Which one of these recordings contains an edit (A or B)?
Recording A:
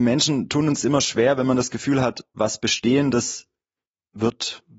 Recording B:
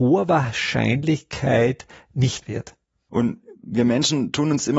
B